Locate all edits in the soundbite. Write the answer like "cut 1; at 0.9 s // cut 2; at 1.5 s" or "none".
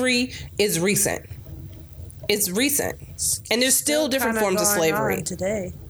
none

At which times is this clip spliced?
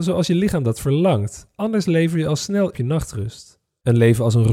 cut 1; at 2.7 s

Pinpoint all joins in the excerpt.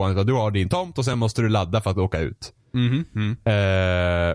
none

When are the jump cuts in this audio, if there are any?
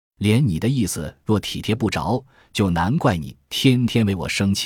none

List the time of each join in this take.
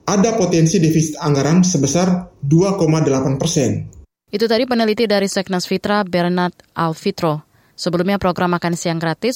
none

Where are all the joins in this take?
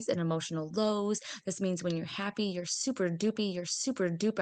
cut 1; at 3.4 s

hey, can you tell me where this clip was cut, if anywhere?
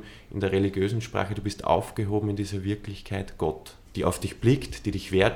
cut 1; at 3.8 s

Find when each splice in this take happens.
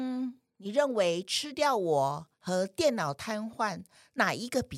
cut 1; at 2.3 s

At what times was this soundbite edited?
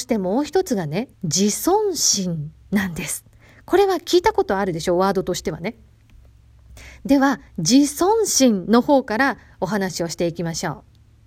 cut 1; at 1.1 s // cut 2; at 7.5 s

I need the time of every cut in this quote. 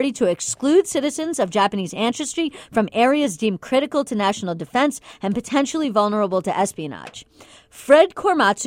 none

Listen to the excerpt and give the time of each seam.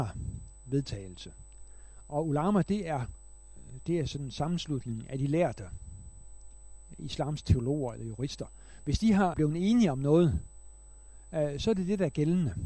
cut 1; at 9.3 s

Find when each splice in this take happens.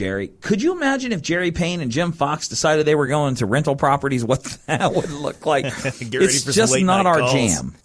none

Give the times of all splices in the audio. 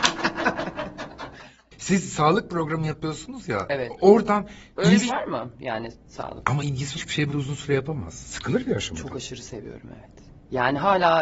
cut 1; at 4.7 s // cut 2; at 5.1 s // cut 3; at 6.6 s // cut 4; at 7.0 s // cut 5; at 7.3 s

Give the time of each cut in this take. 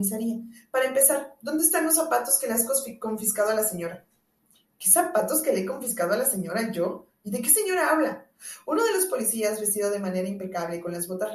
none

